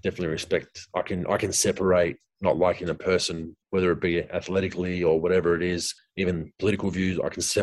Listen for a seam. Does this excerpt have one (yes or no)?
yes